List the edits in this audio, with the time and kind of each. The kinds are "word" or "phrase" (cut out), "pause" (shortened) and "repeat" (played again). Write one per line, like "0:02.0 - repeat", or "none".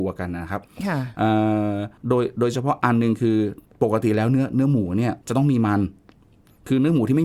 0:02.0 - pause
0:05.2 - pause